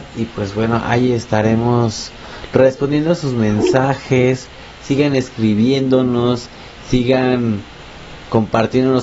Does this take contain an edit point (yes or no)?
no